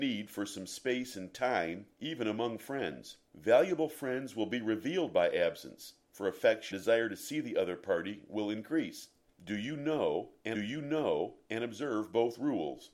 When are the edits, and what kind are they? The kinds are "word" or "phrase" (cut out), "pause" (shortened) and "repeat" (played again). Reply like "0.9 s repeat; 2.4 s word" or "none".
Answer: 1.9 s pause; 3.3 s pause; 6.0 s pause; 6.7 s word; 9.3 s pause; 10.5 s repeat

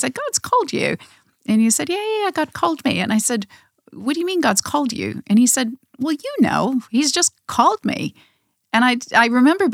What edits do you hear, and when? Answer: none

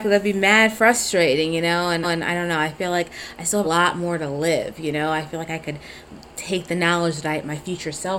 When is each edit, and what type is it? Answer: 2.0 s repeat; 3.6 s phrase

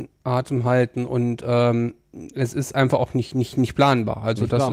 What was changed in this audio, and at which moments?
none

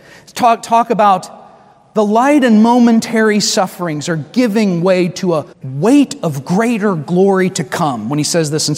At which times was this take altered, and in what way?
5.5 s pause

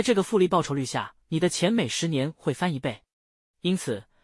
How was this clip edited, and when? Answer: 1.2 s pause

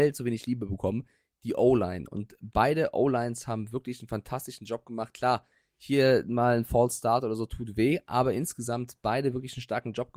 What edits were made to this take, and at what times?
none

